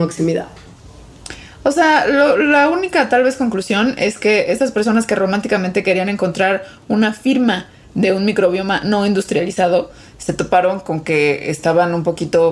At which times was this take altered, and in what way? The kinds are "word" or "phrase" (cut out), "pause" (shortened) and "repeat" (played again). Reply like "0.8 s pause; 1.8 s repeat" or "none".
none